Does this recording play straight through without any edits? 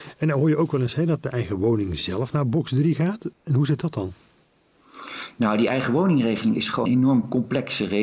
no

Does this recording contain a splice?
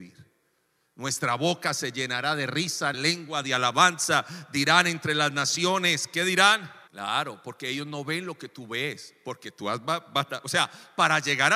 yes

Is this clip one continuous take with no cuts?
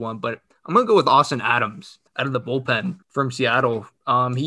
no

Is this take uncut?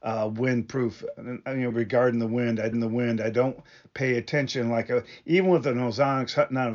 no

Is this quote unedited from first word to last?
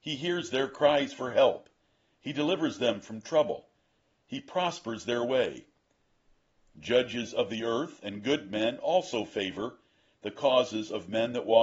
yes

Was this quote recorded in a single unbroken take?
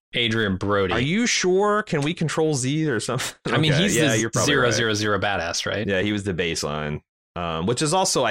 yes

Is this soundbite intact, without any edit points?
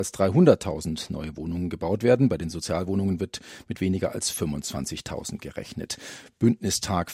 yes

